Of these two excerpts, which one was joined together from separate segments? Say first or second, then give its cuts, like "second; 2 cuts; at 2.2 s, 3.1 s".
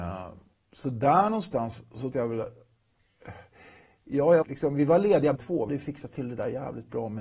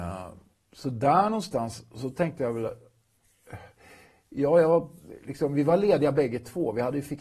first; 4 cuts; at 2.1 s, 4.4 s, 5.4 s, 5.7 s